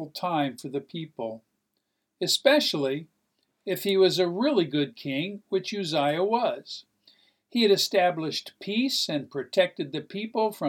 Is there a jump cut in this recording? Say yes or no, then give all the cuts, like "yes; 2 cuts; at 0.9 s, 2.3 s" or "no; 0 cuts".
no; 0 cuts